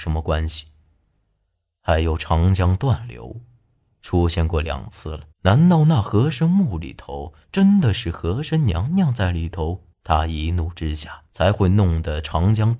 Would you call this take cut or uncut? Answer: cut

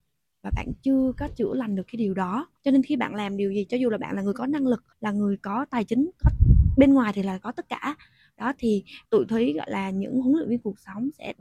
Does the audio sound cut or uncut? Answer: cut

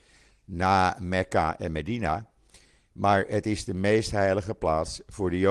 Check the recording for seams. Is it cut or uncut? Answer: uncut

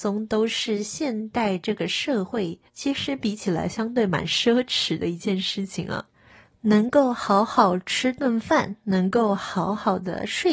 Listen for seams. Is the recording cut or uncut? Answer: cut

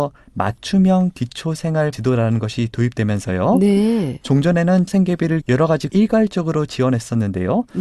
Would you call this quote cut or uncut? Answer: cut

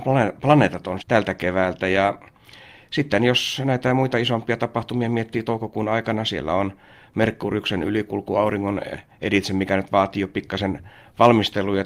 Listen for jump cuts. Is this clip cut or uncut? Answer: cut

